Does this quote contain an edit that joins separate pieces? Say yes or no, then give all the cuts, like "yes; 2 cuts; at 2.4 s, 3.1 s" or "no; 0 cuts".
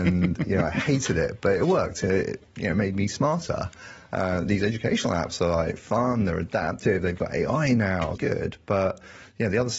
yes; 1 cut; at 8.2 s